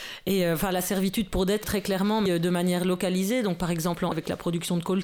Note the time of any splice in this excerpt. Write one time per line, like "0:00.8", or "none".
0:01.6
0:02.3
0:04.1